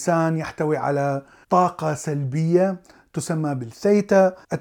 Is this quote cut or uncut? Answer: uncut